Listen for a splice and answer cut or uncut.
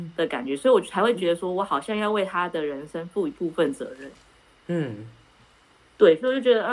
uncut